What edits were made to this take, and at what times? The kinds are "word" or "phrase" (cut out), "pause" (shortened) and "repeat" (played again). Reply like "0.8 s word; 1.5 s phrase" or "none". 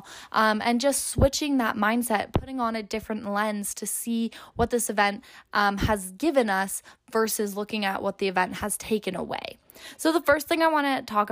none